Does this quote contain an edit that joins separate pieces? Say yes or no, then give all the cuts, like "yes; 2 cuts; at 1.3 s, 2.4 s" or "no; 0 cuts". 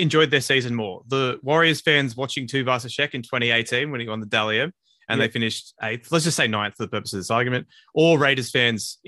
no; 0 cuts